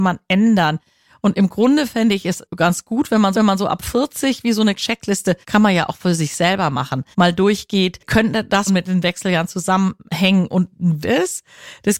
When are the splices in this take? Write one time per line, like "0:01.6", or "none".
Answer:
0:03.3
0:04.8
0:05.4
0:07.1
0:08.7
0:11.0